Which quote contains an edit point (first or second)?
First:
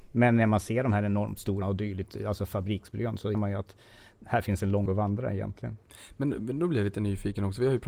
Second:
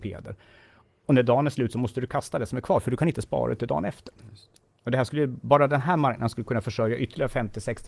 first